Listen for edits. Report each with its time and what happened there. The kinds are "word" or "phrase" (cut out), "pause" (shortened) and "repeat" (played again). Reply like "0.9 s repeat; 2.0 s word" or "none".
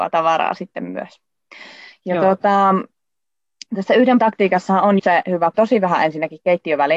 4.2 s word; 5.0 s word; 5.5 s phrase